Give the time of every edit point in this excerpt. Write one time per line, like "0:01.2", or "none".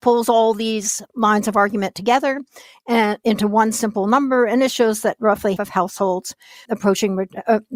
0:05.6
0:06.7

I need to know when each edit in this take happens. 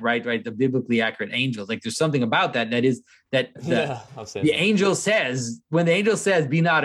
0:03.6

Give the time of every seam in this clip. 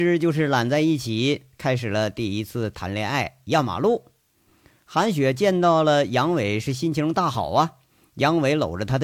none

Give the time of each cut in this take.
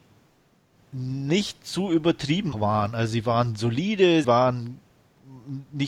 0:02.5
0:04.2

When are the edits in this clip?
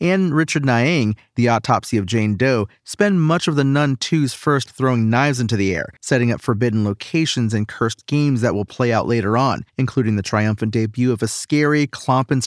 0:04.7
0:06.0
0:09.7

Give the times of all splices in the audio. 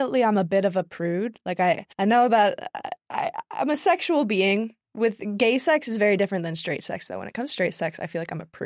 0:01.9
0:04.8

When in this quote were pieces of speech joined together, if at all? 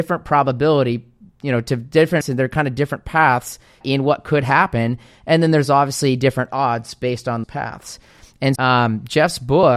0:02.2
0:03.8
0:07.4
0:08.6

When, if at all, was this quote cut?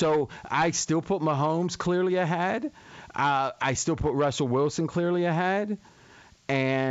none

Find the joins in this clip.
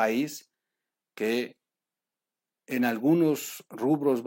none

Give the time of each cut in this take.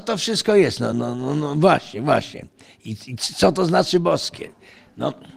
none

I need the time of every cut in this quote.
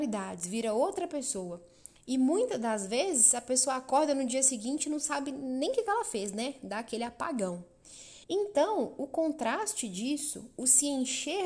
0:08.2

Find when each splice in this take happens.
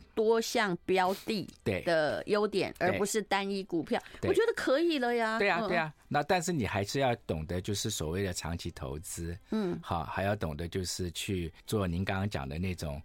0:11.6

